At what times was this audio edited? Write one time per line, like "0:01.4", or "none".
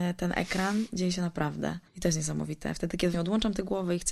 0:01.9
0:03.1